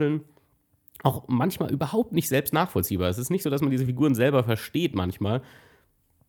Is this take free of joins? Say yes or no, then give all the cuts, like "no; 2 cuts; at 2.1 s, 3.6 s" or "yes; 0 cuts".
yes; 0 cuts